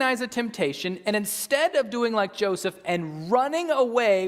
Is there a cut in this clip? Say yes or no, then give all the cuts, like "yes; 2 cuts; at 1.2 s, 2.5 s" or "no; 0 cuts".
no; 0 cuts